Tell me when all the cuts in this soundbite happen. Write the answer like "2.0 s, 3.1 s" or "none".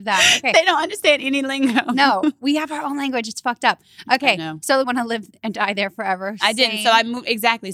4.8 s